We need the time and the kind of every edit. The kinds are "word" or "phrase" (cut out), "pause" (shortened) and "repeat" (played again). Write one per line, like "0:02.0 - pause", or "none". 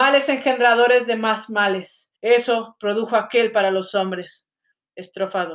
0:02.1 - pause